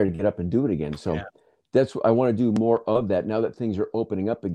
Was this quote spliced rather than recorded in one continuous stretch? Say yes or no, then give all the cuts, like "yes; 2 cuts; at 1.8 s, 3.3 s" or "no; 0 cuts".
no; 0 cuts